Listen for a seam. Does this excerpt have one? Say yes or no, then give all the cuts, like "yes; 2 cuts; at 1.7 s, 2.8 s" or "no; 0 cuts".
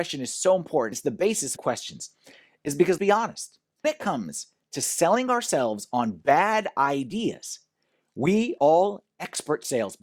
yes; 5 cuts; at 0.9 s, 1.6 s, 3.0 s, 3.8 s, 8.6 s